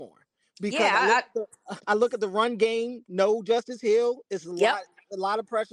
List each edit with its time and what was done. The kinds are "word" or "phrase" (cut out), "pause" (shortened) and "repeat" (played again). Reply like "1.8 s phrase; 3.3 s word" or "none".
1.8 s word